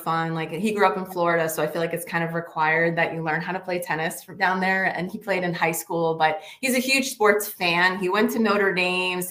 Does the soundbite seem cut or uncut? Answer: uncut